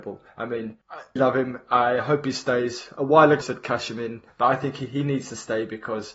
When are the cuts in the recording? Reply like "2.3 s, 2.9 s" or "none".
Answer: 1.2 s, 3.4 s